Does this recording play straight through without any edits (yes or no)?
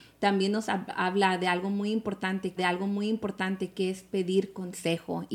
no